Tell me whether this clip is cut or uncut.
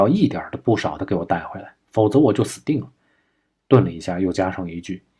uncut